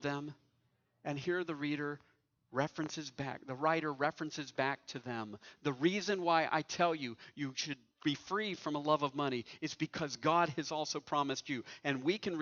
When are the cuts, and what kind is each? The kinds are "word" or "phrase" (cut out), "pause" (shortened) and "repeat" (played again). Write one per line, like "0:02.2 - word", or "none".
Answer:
none